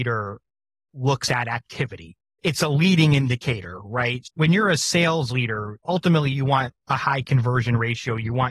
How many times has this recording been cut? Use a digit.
1